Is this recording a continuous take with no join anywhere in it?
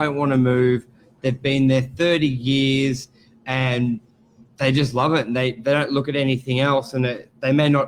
yes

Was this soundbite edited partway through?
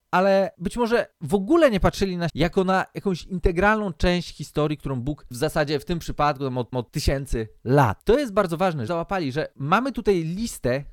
yes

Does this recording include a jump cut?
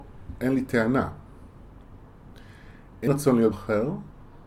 yes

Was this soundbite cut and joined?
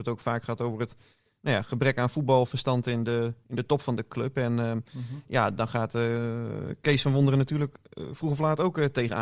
no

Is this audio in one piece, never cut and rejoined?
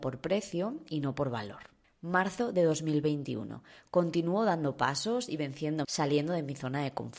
no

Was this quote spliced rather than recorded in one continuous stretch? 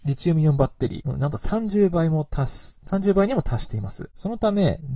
yes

